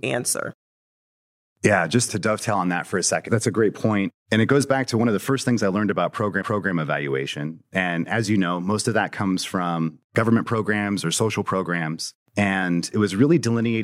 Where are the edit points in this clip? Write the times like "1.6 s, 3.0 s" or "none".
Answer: 2.1 s, 3.3 s, 4.2 s, 6.4 s, 10.0 s, 12.3 s